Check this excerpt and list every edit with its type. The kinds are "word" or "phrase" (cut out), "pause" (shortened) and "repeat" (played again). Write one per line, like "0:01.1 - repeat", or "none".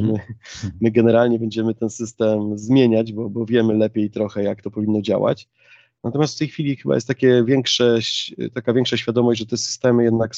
none